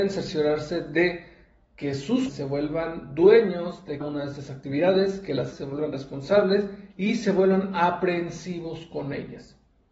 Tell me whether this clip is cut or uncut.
cut